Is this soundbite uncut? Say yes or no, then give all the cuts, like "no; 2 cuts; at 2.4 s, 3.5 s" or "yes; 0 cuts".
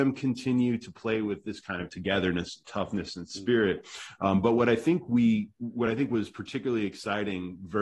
yes; 0 cuts